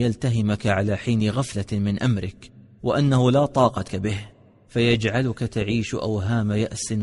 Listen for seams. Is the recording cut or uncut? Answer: cut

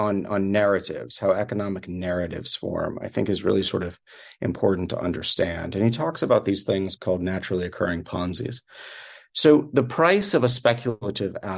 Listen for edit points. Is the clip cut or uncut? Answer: cut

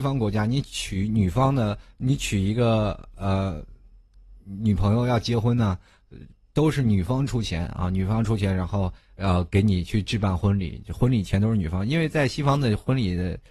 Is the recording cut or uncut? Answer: uncut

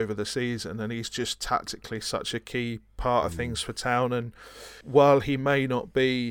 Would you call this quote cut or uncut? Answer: uncut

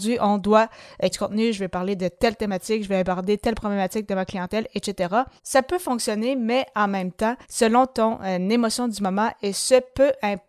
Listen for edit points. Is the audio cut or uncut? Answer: cut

